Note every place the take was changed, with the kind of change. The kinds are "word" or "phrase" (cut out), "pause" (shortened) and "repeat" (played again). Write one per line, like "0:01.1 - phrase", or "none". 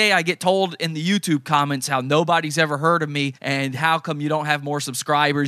0:03.3 - pause